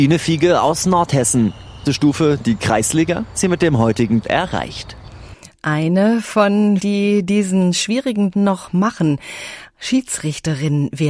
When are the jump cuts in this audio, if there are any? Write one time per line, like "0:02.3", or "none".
0:01.9
0:03.3
0:04.2
0:06.8
0:08.3